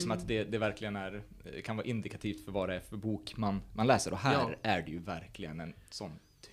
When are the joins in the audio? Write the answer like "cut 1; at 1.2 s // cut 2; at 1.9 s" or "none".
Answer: none